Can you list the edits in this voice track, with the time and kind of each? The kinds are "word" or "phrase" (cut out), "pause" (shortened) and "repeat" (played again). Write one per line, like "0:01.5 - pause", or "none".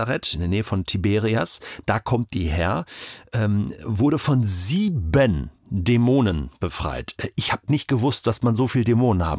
none